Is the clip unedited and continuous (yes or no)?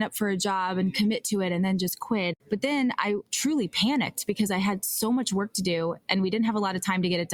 no